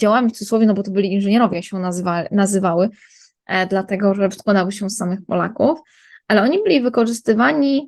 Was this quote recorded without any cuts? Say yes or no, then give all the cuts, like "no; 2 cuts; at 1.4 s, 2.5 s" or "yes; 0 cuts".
yes; 0 cuts